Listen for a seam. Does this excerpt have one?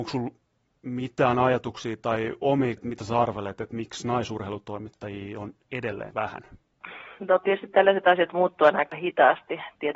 yes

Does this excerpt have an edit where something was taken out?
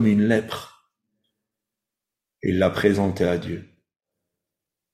no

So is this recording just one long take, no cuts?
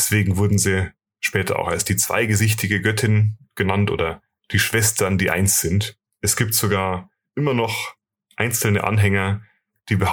yes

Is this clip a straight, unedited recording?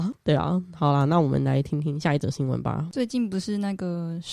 yes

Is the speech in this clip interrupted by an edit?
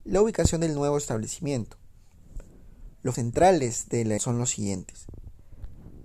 yes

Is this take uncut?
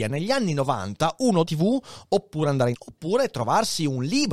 no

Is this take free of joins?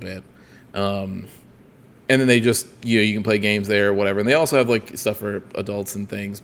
yes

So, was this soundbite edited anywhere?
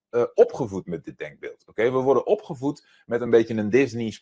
no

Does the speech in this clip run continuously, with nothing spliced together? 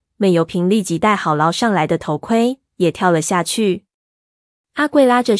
yes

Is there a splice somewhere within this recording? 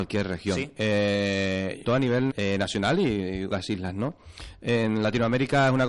yes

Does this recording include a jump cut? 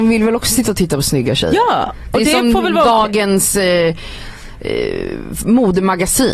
no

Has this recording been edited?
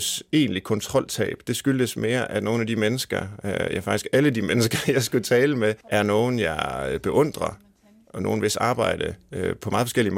yes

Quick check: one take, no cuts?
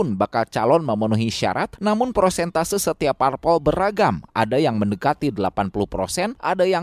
yes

